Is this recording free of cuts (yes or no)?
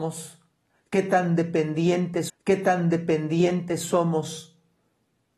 no